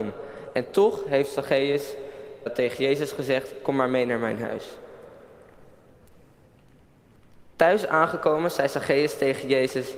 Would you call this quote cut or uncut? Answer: cut